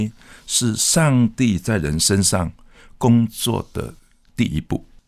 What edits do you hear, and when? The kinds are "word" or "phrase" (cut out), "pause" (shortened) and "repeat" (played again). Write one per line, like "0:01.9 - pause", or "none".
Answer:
none